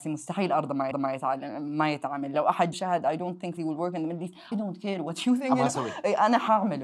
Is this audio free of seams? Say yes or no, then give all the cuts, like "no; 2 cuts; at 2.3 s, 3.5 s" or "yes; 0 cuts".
no; 4 cuts; at 0.9 s, 2.7 s, 3.6 s, 4.5 s